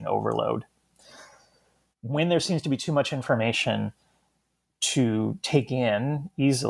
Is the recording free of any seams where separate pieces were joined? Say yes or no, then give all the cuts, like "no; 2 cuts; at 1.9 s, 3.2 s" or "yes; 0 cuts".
yes; 0 cuts